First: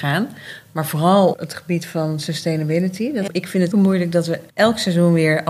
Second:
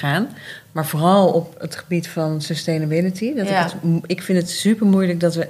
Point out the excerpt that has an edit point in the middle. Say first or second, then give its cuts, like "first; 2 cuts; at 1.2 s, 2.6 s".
first; 4 cuts; at 1.3 s, 3.3 s, 3.7 s, 4.5 s